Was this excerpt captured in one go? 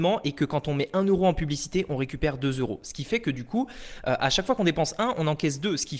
yes; 0 cuts

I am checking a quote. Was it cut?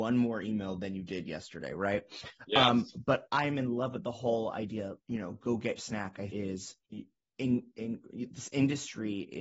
yes; 4 cuts; at 5.0 s, 5.8 s, 6.3 s, 6.8 s

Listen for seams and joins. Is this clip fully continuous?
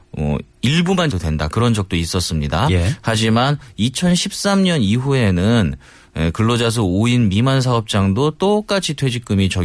no; 1 cut; at 1.1 s

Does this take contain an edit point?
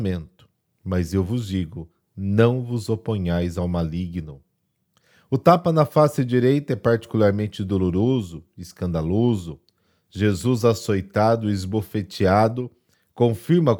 no; 0 cuts

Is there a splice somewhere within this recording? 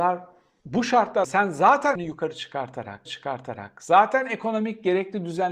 yes; 3 cuts; at 1.2 s, 2.0 s, 3.1 s

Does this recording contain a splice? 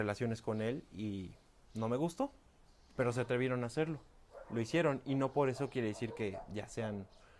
no; 0 cuts

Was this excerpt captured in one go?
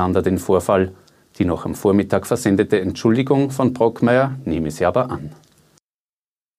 yes; 0 cuts

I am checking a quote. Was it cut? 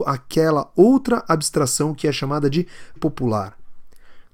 yes; 1 cut; at 3.0 s

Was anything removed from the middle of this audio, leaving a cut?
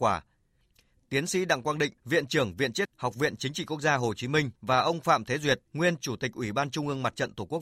yes; 4 cuts; at 2.0 s, 2.8 s, 4.6 s, 5.7 s

